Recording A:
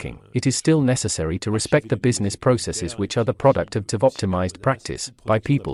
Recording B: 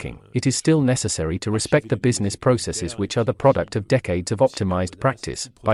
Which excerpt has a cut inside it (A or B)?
A